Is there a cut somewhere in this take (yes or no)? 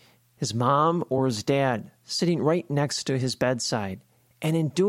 no